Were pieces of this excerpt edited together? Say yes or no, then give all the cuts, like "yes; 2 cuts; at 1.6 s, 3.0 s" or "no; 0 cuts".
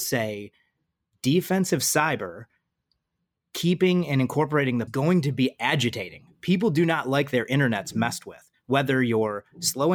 yes; 1 cut; at 4.9 s